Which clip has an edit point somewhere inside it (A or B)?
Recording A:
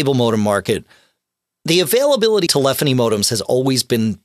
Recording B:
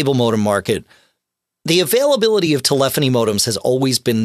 A